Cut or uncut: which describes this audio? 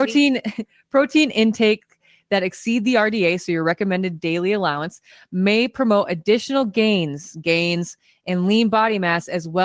uncut